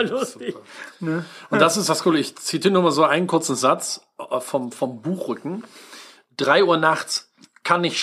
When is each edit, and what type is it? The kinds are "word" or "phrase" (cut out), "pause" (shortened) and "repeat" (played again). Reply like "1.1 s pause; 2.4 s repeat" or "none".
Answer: none